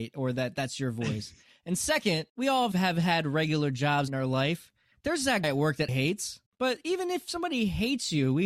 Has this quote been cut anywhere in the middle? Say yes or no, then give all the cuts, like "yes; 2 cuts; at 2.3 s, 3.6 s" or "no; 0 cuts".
yes; 6 cuts; at 2.3 s, 2.7 s, 4.1 s, 5.4 s, 5.9 s, 6.5 s